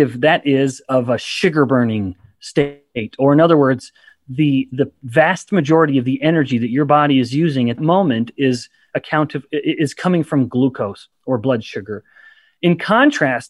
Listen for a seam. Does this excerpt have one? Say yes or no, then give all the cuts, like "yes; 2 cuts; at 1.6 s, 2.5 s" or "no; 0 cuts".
yes; 1 cut; at 7.8 s